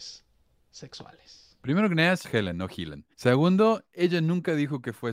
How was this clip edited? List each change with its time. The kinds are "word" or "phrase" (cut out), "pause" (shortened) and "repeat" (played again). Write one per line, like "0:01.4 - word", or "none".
0:02.2 - word
0:03.1 - pause